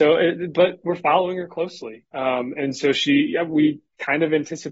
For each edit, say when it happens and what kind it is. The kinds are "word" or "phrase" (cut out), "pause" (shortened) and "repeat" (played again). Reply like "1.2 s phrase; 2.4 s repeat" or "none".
none